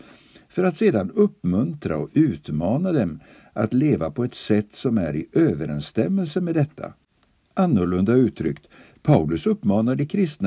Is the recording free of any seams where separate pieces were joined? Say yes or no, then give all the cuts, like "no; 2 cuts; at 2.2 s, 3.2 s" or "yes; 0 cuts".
yes; 0 cuts